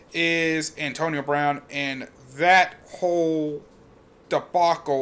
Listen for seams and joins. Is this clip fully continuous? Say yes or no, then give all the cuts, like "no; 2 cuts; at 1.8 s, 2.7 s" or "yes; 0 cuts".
yes; 0 cuts